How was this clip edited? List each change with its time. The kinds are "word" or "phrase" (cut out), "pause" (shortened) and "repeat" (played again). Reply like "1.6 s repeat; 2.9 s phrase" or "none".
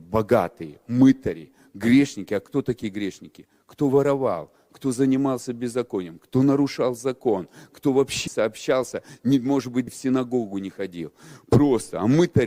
8.3 s word; 9.9 s word